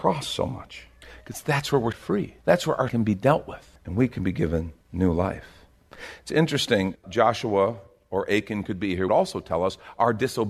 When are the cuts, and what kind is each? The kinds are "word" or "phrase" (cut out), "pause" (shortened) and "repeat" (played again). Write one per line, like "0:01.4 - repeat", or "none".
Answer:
0:01.0 - pause
0:01.9 - word
0:02.4 - pause
0:02.9 - word
0:03.8 - pause
0:04.8 - pause
0:07.0 - word
0:09.1 - phrase